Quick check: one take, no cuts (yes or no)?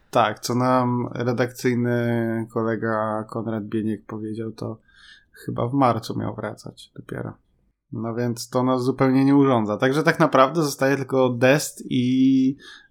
yes